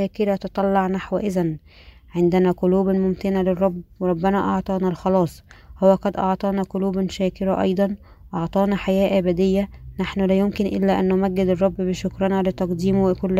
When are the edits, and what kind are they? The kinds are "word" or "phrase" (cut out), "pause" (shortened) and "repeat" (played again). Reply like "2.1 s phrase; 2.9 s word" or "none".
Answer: none